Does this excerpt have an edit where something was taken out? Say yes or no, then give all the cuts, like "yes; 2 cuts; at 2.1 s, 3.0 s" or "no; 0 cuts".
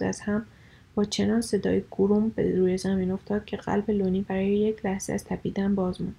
no; 0 cuts